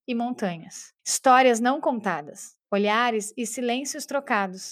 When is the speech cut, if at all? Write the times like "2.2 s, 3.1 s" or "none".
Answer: 1.0 s, 2.6 s